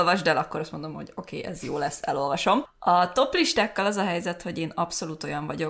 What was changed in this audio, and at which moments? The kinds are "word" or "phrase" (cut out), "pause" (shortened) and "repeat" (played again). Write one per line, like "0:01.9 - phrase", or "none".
none